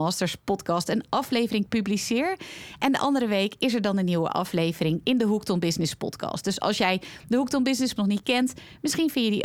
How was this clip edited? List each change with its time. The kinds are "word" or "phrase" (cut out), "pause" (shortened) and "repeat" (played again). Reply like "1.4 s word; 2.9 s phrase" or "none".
8.0 s word